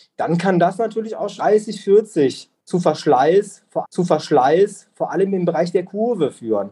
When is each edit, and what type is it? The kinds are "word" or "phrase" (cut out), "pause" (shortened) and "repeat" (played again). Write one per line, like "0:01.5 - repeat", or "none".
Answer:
0:01.4 - word
0:03.8 - repeat